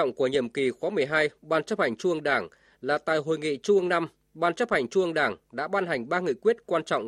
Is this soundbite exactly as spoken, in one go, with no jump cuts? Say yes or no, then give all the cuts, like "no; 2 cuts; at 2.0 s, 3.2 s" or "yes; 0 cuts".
yes; 0 cuts